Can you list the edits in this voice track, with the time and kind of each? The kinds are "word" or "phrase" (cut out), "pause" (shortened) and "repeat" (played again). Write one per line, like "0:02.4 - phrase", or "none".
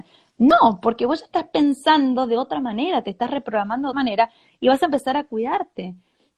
0:03.9 - word